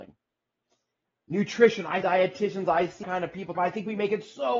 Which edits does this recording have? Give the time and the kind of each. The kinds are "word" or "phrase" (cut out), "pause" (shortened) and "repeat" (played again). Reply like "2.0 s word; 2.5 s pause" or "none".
2.0 s word; 3.0 s word; 3.5 s word